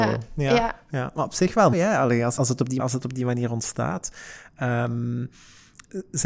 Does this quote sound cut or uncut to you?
cut